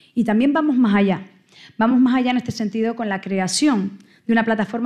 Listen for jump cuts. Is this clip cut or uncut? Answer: uncut